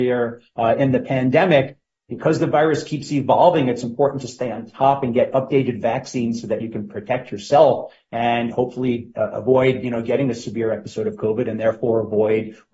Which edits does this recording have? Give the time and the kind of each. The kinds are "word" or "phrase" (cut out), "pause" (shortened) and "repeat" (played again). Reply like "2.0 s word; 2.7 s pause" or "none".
none